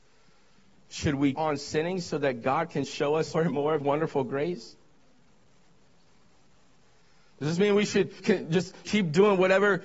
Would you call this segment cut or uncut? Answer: cut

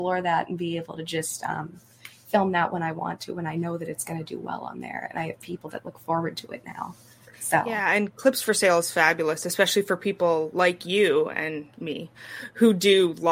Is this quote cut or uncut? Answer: uncut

